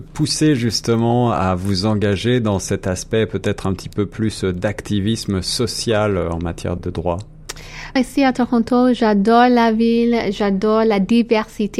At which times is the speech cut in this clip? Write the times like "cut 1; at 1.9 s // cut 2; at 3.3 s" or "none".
cut 1; at 6.8 s // cut 2; at 8.0 s